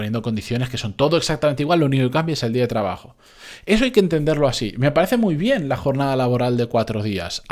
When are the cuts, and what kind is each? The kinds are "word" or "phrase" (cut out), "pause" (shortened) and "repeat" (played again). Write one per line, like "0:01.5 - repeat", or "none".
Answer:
none